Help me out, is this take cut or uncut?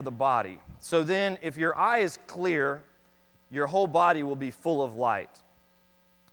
uncut